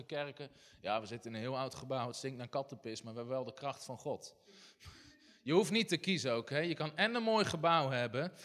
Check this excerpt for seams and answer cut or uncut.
uncut